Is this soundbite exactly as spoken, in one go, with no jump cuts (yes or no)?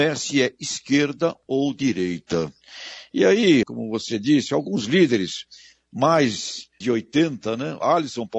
no